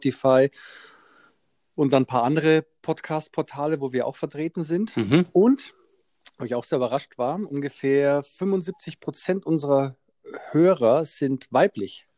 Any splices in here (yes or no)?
no